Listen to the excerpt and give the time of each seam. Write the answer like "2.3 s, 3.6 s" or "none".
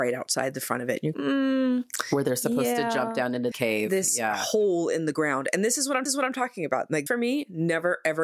1.1 s, 3.5 s, 6.1 s, 7.1 s